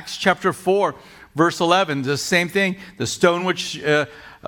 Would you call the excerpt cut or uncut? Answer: uncut